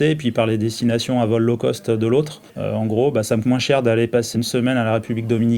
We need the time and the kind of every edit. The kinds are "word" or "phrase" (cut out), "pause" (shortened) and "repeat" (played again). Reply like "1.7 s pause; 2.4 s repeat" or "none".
2.5 s pause; 3.4 s word; 4.3 s word